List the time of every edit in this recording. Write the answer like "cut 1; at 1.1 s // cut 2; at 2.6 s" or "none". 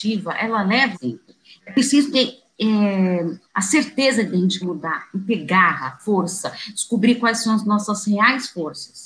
cut 1; at 0.9 s // cut 2; at 2.1 s // cut 3; at 3.4 s // cut 4; at 4.6 s